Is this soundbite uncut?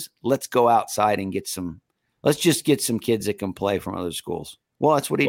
yes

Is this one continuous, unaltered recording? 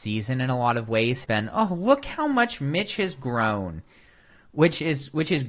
no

